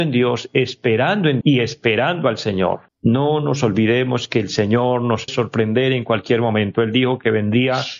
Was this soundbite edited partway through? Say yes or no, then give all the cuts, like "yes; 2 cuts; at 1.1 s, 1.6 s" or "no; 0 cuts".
yes; 3 cuts; at 1.4 s, 2.9 s, 5.3 s